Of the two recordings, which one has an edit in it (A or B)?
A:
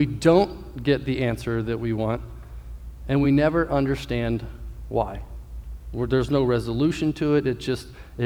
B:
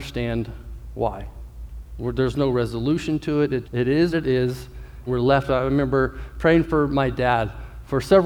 B